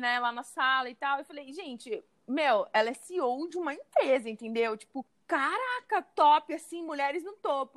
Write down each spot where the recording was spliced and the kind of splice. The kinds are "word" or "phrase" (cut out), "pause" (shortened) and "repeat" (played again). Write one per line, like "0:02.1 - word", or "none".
none